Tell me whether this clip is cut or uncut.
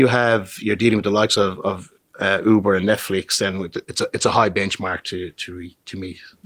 uncut